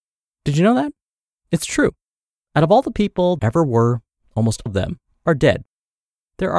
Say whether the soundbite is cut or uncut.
cut